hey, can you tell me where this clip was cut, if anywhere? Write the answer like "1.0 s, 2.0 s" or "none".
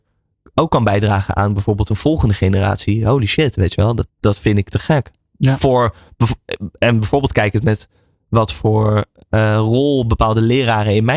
4.1 s